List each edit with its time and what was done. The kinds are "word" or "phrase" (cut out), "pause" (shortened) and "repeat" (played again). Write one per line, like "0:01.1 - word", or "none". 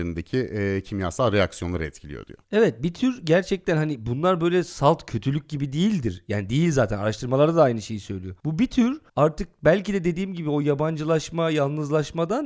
0:02.4 - pause
0:08.4 - pause
0:09.1 - pause